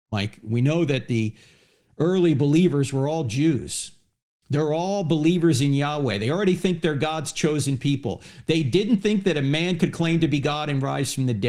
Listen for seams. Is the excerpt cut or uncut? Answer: uncut